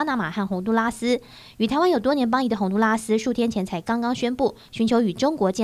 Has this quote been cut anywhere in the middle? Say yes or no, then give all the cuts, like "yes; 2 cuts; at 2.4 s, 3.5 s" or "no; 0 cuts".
no; 0 cuts